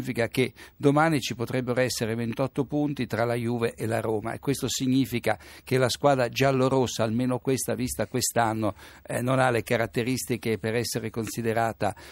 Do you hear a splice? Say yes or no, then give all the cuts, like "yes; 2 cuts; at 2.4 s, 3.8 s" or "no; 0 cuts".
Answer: no; 0 cuts